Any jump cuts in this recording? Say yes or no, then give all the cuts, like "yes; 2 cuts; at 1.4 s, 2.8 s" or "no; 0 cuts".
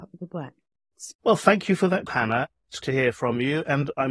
yes; 2 cuts; at 2.1 s, 2.8 s